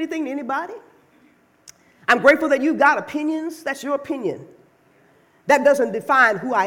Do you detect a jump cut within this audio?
no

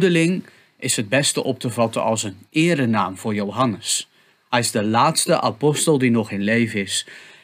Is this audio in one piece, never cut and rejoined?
yes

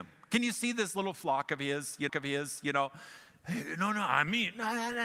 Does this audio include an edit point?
yes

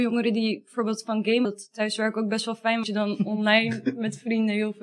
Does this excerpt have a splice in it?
yes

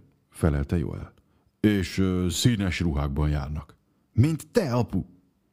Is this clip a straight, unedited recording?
yes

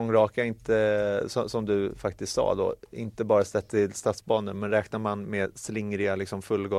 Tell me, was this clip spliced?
no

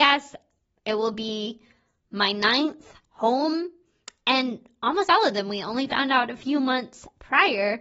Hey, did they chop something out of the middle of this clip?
no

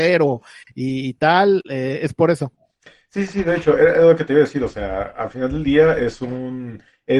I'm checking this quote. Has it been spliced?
no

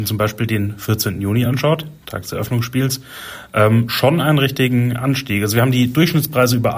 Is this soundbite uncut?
yes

